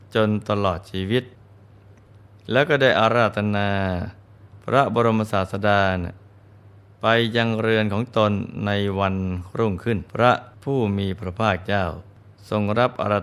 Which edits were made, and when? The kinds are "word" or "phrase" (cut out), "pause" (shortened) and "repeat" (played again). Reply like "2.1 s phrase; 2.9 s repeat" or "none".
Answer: 10.1 s pause